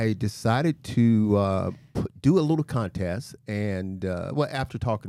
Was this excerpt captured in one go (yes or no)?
yes